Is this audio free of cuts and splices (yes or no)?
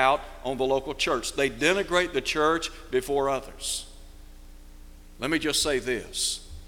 yes